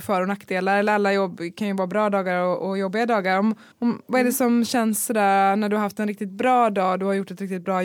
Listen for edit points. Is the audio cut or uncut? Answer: cut